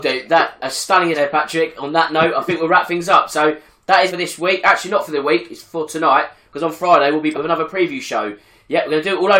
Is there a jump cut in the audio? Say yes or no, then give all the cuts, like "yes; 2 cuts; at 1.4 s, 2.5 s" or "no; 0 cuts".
yes; 3 cuts; at 1.1 s, 4.1 s, 7.3 s